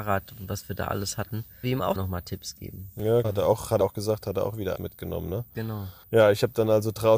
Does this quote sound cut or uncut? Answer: cut